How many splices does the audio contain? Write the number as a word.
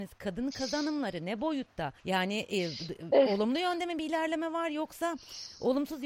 one